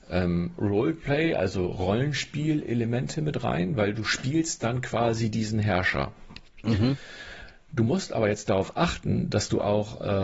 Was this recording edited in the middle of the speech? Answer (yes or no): no